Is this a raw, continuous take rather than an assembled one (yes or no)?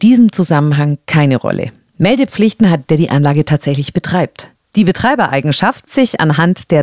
no